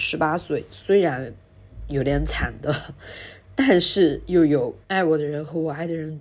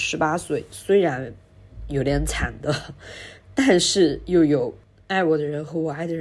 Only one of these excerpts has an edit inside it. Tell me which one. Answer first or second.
first